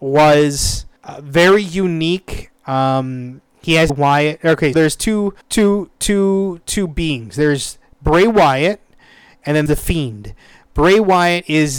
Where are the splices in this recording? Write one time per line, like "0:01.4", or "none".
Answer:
0:01.0
0:03.9
0:04.7
0:05.4
0:09.7